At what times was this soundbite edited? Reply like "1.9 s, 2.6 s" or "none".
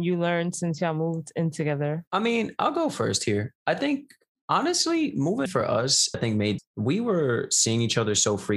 2.1 s, 4.3 s, 5.5 s, 6.1 s, 6.6 s